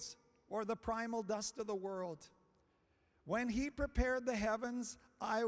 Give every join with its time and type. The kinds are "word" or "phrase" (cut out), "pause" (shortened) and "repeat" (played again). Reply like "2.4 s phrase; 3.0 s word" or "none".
none